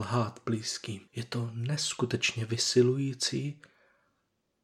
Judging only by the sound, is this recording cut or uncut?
cut